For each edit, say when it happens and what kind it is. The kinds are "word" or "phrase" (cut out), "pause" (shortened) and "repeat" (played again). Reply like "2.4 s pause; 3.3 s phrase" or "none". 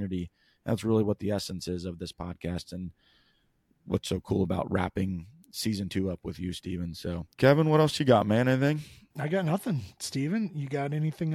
none